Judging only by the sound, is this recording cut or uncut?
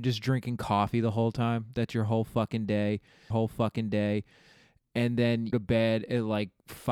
cut